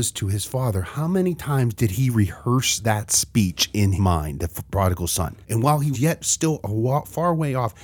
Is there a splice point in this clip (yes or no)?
yes